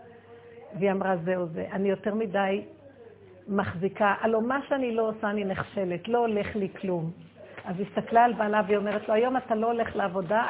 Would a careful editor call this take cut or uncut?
uncut